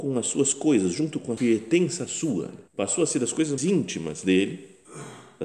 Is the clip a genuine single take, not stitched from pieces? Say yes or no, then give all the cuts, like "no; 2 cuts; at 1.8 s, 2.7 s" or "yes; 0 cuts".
no; 3 cuts; at 1.4 s, 2.7 s, 3.6 s